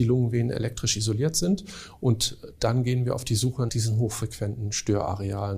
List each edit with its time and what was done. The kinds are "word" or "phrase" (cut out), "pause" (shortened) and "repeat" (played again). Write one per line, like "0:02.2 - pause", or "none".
0:03.7 - word